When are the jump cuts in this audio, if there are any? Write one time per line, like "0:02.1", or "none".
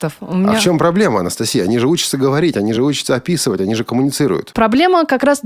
none